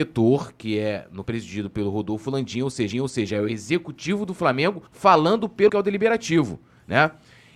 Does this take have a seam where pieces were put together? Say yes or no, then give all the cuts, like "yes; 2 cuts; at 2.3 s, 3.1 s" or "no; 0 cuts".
yes; 4 cuts; at 1.2 s, 2.9 s, 4.9 s, 5.7 s